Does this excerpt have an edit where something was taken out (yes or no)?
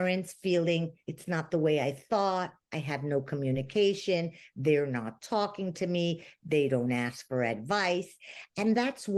yes